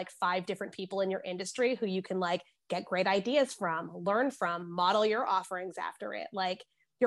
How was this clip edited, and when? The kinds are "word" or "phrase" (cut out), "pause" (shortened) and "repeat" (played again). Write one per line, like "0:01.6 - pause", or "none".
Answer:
none